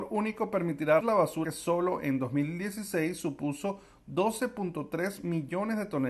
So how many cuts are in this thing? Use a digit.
2